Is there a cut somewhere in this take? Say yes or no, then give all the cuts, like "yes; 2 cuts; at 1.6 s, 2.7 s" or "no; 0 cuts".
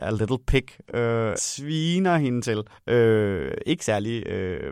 yes; 2 cuts; at 1.4 s, 2.7 s